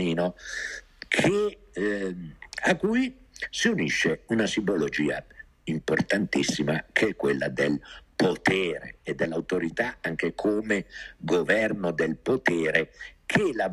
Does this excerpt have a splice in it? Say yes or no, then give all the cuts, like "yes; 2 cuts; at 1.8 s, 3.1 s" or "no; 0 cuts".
no; 0 cuts